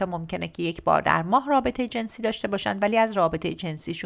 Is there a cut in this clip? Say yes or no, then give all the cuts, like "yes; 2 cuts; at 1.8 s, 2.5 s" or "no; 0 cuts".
no; 0 cuts